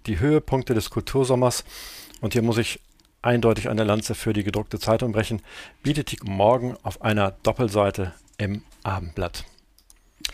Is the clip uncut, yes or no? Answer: no